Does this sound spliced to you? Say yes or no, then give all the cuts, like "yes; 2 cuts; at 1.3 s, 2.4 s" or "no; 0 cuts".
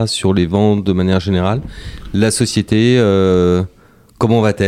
no; 0 cuts